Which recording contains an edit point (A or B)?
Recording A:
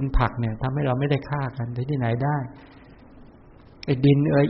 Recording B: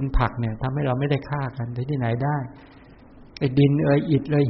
B